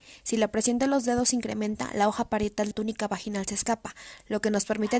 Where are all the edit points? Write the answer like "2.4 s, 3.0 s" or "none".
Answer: 2.7 s